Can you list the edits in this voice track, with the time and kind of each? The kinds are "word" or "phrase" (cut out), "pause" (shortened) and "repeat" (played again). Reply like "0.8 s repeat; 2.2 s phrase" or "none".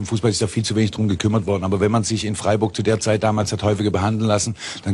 none